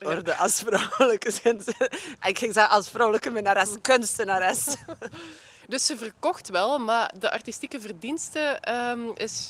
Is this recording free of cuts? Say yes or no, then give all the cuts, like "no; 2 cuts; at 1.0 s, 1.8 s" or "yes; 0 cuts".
yes; 0 cuts